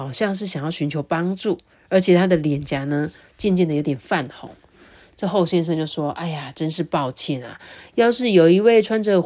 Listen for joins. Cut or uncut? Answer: uncut